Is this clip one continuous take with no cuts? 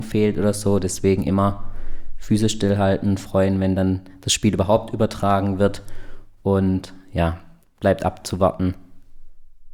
yes; 0 cuts

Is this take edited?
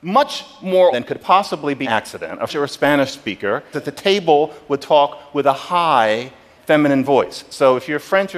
yes; 5 cuts; at 0.9 s, 1.8 s, 2.5 s, 3.7 s, 6.6 s

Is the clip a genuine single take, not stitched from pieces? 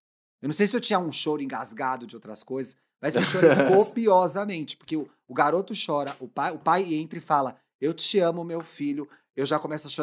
yes; 0 cuts

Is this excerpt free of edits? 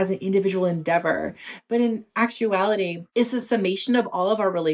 yes; 0 cuts

